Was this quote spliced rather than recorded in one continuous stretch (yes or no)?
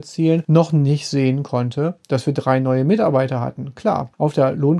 no